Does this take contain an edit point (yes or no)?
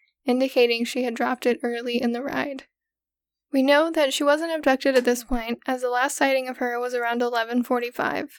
no